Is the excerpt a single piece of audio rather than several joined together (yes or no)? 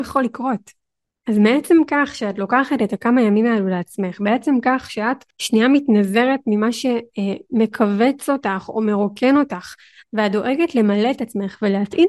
no